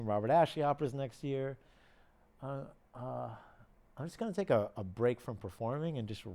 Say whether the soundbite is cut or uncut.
uncut